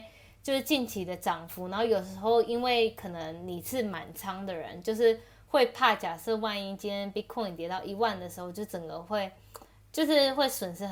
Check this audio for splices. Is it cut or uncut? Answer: uncut